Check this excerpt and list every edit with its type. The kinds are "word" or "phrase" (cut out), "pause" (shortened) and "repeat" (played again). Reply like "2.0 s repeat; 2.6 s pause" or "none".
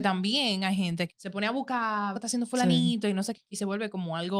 1.1 s word; 2.1 s phrase; 3.3 s word